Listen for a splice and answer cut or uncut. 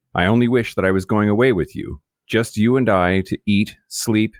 uncut